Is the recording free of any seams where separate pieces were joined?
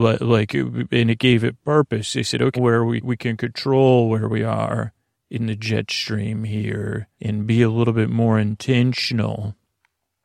no; 4 cuts; at 2.5 s, 3.0 s, 5.1 s, 7.1 s

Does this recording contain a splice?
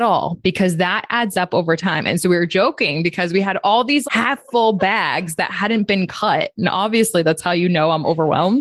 yes; 1 cut; at 4.0 s

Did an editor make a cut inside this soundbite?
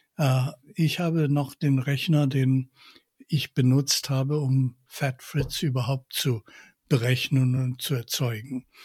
no; 0 cuts

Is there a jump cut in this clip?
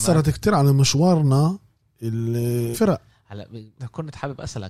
yes; 2 cuts; at 2.7 s, 3.8 s

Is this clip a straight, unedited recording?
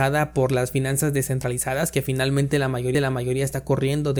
no; 1 cut; at 2.9 s

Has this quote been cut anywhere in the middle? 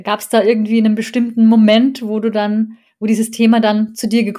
no; 0 cuts

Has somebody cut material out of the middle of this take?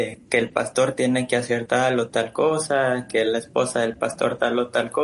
no; 0 cuts

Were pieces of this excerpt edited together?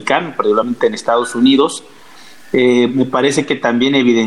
no; 0 cuts

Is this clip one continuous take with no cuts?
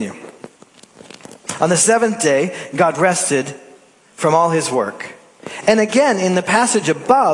yes; 0 cuts

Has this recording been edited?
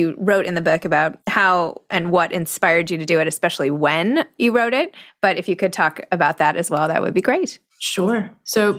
yes; 2 cuts; at 1.2 s, 7.7 s

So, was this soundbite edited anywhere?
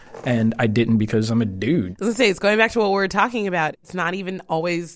no; 0 cuts

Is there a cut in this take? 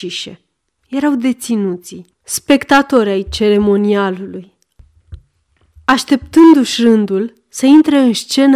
yes; 1 cut; at 2.1 s

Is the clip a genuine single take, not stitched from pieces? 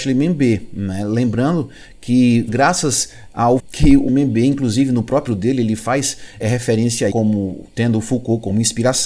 no; 6 cuts; at 2.5 s, 3.6 s, 4.1 s, 5.3 s, 6.4 s, 7.1 s

